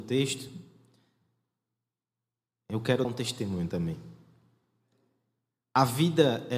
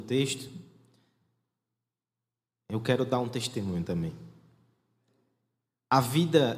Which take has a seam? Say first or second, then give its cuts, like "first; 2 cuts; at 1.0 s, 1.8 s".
first; 1 cut; at 3.0 s